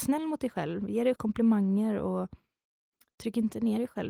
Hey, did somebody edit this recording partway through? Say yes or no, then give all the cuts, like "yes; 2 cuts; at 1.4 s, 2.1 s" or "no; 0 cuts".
yes; 1 cut; at 1.2 s